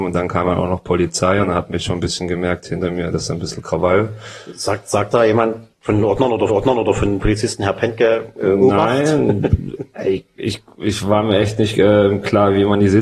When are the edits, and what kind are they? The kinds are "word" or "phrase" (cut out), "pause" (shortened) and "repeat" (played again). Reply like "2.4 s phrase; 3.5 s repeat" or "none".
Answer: 5.7 s pause; 6.5 s repeat